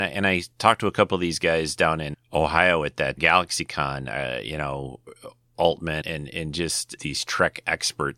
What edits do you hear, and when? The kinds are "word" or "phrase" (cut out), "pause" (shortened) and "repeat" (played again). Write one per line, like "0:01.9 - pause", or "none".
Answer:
0:02.1 - word
0:03.2 - word
0:06.0 - word
0:07.0 - word